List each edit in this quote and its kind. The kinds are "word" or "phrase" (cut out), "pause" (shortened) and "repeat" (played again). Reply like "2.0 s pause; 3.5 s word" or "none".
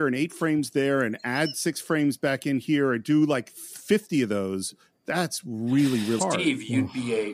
6.2 s word